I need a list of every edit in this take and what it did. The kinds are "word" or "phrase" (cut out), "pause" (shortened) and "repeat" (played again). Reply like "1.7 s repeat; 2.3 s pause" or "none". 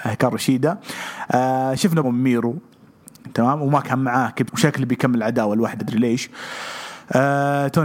2.0 s word; 4.5 s word; 5.8 s word